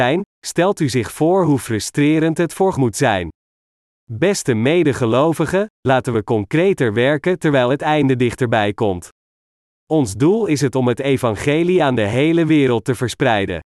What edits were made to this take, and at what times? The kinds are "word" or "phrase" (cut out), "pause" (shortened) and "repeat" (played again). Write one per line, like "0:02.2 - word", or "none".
0:02.7 - word